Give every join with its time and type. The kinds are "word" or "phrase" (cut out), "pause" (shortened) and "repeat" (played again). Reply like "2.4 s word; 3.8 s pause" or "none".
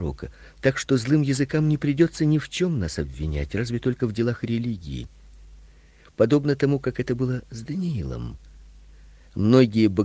none